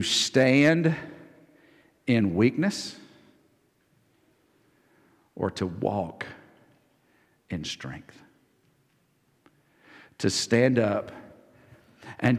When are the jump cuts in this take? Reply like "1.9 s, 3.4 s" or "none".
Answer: none